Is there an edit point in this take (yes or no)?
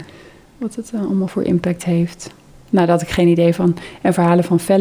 no